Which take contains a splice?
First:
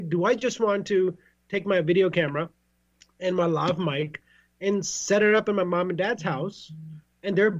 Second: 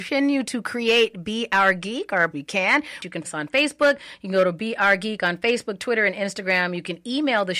second; 2 cuts; at 2.3 s, 3.2 s

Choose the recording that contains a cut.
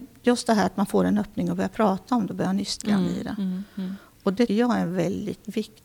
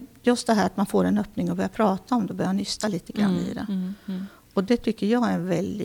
first; 2 cuts; at 2.8 s, 4.5 s

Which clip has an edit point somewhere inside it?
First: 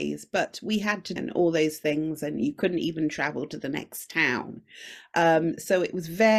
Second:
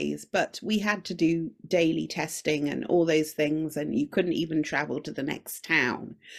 first; 1 cut; at 1.2 s

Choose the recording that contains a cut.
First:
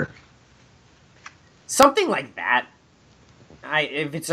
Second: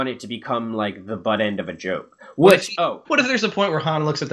second; 1 cut; at 3.0 s

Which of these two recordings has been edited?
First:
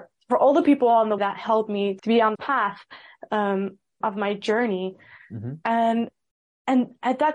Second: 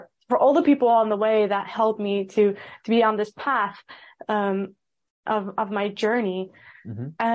first; 4 cuts; at 1.2 s, 2.0 s, 2.3 s, 4.0 s

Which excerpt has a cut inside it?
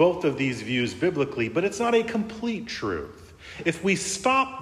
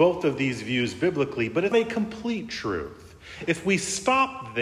second; 1 cut; at 1.7 s

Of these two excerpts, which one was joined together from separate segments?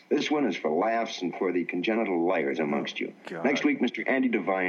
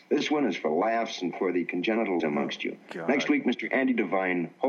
second; 1 cut; at 2.2 s

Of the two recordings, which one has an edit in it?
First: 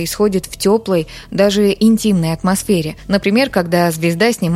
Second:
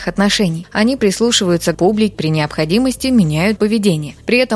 second; 3 cuts; at 1.7 s, 2.1 s, 3.6 s

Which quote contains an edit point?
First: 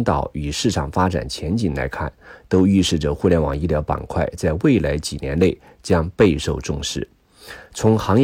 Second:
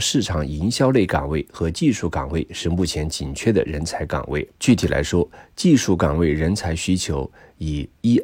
second; 1 cut; at 4.5 s

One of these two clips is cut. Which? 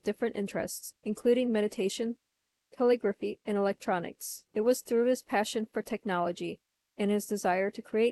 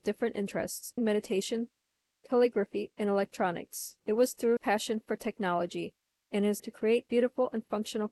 second; 3 cuts; at 1.0 s, 4.6 s, 6.6 s

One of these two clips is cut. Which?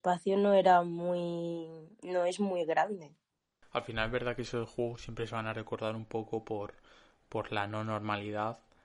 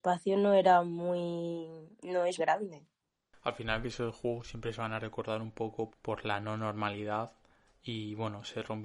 second; 3 cuts; at 2.4 s, 3.8 s, 5.9 s

